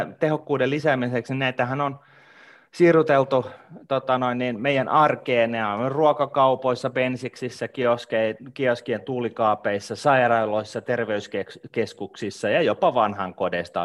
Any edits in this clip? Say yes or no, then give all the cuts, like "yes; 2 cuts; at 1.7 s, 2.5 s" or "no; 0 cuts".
no; 0 cuts